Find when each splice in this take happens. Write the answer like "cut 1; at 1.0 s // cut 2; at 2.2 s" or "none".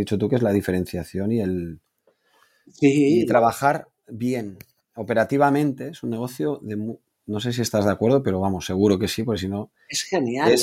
none